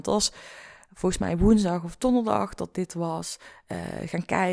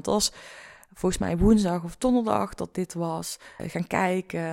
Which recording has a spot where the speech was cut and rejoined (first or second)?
second